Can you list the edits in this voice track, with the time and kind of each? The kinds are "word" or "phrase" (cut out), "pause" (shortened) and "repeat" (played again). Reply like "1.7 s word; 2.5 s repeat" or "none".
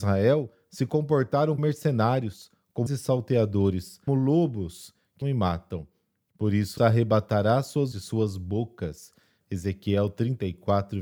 1.6 s word; 2.9 s word; 4.1 s word; 5.2 s word; 6.8 s word; 7.9 s word